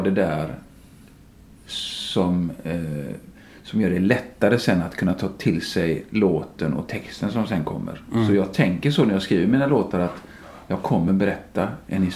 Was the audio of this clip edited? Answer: no; 0 cuts

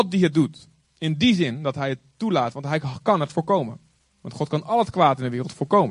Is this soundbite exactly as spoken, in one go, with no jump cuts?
yes; 0 cuts

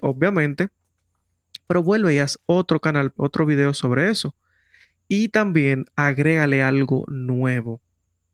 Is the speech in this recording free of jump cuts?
no; 1 cut; at 3.2 s

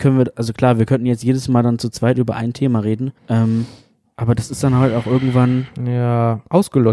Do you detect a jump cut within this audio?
yes; 1 cut; at 3.2 s

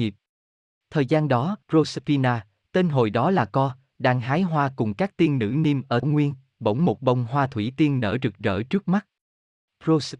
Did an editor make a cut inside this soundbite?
yes; 2 cuts; at 1.6 s, 6.0 s

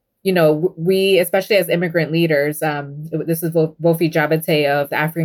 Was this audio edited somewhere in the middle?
no; 0 cuts

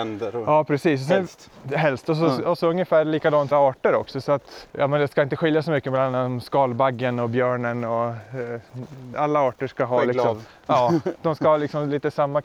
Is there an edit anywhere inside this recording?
yes; 3 cuts; at 3.5 s, 4.7 s, 9.1 s

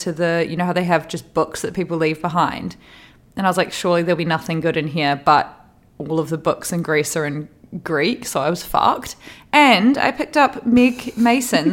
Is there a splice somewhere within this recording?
no; 0 cuts

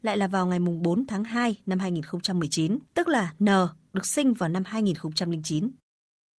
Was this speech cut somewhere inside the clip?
yes; 1 cut; at 2.9 s

